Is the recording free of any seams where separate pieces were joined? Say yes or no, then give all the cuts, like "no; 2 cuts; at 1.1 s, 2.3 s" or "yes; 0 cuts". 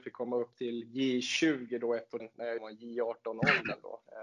no; 2 cuts; at 2.2 s, 2.6 s